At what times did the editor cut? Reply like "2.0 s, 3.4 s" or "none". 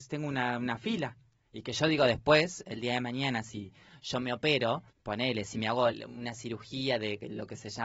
4.9 s, 5.9 s